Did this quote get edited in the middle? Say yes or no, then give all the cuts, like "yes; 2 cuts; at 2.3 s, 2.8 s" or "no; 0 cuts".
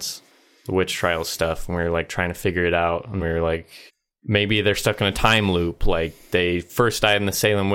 yes; 2 cuts; at 3.2 s, 3.9 s